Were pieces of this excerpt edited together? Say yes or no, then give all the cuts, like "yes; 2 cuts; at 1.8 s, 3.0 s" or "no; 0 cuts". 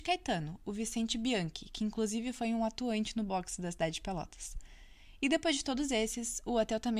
no; 0 cuts